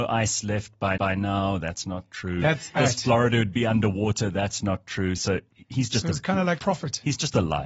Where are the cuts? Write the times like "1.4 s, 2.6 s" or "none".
1.0 s, 2.8 s, 6.6 s